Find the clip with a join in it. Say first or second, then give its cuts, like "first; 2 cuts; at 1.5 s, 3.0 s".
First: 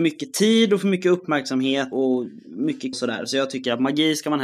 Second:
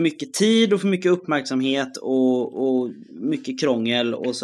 first; 2 cuts; at 1.9 s, 2.9 s